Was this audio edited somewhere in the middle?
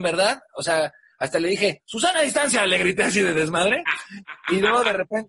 no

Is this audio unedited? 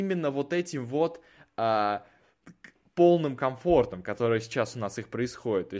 yes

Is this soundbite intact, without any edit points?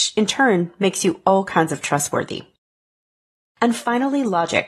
yes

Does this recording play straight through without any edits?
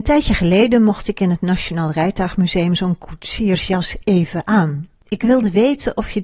yes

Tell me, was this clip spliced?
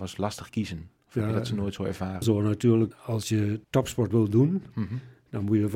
yes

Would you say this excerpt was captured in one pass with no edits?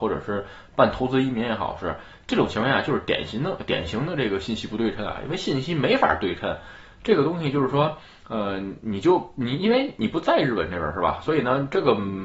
yes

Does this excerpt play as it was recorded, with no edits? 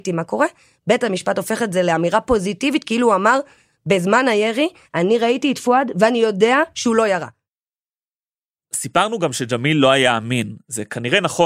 yes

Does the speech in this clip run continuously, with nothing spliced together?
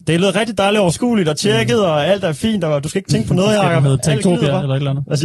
yes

